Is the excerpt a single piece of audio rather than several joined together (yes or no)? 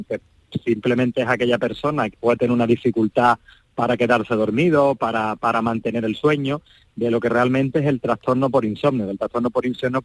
no